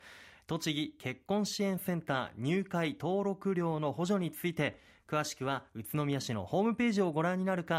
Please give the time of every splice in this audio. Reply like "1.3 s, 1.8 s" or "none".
none